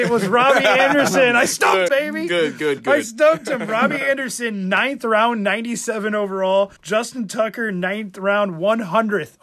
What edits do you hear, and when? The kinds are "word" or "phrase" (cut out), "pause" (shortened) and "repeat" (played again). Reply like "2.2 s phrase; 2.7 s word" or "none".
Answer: 1.9 s word; 6.8 s pause